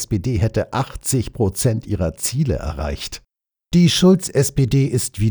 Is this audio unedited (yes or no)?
yes